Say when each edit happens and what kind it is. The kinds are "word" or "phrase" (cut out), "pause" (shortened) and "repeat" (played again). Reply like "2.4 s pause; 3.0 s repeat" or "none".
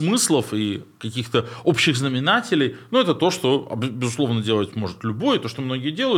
none